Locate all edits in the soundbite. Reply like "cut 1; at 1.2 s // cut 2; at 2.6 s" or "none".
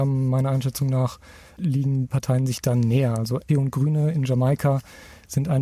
cut 1; at 2.1 s // cut 2; at 3.5 s